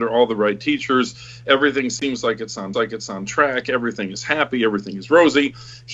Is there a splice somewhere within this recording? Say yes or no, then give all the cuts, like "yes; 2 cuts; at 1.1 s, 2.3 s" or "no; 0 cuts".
yes; 1 cut; at 2.7 s